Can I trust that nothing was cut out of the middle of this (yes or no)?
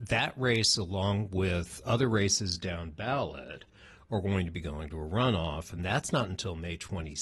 yes